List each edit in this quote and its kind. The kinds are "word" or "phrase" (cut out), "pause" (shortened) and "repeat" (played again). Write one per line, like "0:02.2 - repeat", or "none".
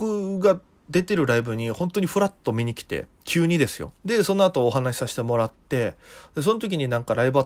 0:03.1 - pause
0:04.0 - pause

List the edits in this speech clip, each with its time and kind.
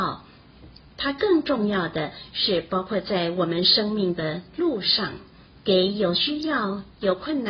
0:05.5 - pause

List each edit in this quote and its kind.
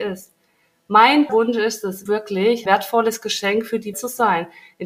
0:01.3 - word
0:02.1 - word
0:02.7 - word
0:03.9 - word

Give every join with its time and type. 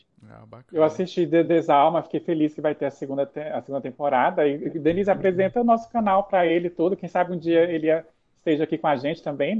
none

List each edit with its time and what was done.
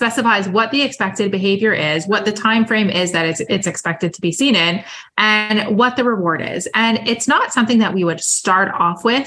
none

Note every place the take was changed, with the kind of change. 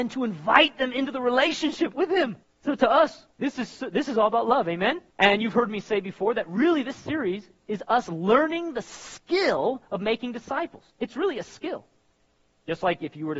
0:02.4 - pause
0:03.3 - pause
0:05.1 - pause
0:09.8 - pause
0:10.9 - pause

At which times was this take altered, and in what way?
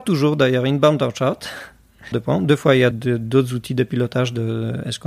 0:02.1 - phrase
0:02.9 - word

